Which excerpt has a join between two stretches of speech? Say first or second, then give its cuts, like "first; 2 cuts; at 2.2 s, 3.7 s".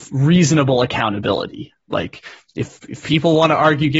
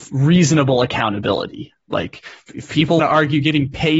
second; 2 cuts; at 2.5 s, 3.0 s